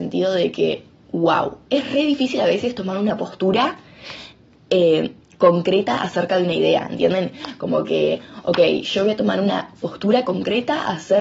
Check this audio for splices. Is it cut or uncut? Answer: uncut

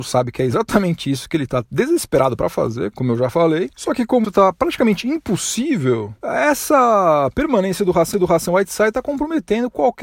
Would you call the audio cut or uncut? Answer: cut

